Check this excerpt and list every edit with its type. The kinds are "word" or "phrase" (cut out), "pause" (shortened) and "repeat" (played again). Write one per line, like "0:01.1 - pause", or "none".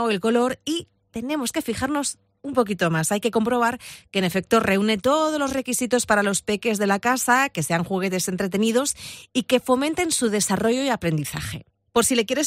none